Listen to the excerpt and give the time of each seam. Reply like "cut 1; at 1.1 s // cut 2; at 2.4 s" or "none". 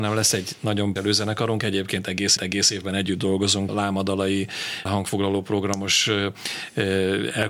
cut 1; at 1.0 s // cut 2; at 2.4 s // cut 3; at 3.7 s // cut 4; at 4.9 s

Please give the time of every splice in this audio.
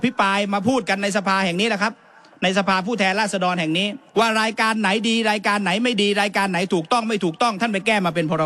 cut 1; at 4.1 s

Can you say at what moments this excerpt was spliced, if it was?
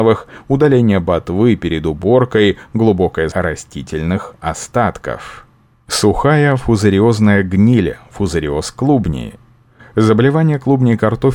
cut 1; at 3.3 s

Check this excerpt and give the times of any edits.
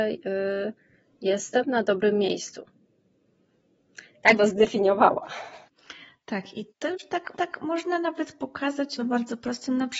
cut 1; at 4.4 s // cut 2; at 6.7 s // cut 3; at 7.3 s // cut 4; at 9.0 s

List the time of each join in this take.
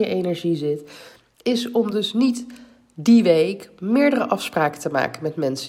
none

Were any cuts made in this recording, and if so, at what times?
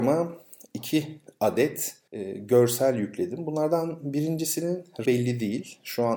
cut 1; at 2.1 s // cut 2; at 5.0 s

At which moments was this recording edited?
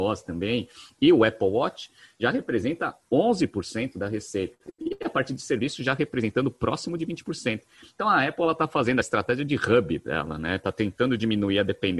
cut 1; at 9.0 s

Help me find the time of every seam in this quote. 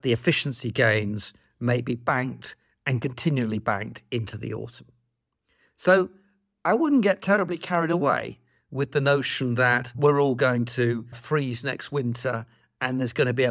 none

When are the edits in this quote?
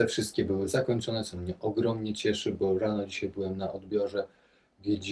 none

